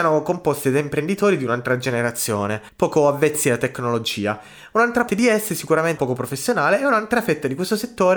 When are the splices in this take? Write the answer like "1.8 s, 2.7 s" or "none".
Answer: 5.1 s, 6.0 s